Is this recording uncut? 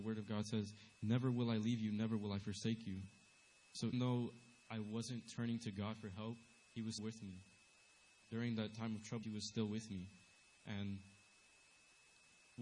no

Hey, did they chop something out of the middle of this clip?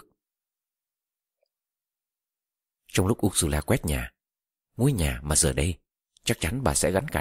no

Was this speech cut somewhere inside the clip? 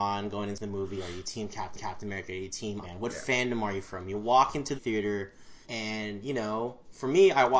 yes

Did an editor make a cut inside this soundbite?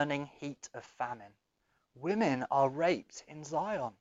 no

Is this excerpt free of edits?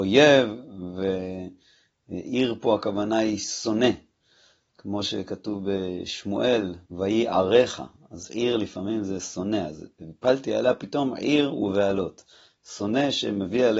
no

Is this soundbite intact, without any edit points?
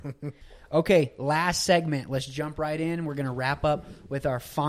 yes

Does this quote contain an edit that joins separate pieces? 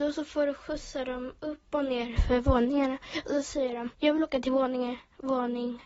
yes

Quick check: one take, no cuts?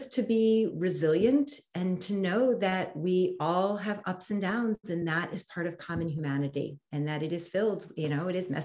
yes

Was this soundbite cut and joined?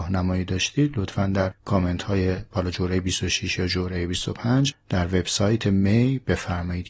no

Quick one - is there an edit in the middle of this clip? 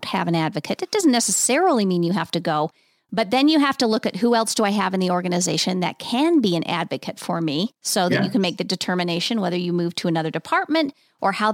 yes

